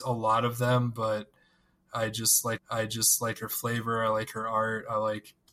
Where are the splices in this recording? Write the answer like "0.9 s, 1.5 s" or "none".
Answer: 2.6 s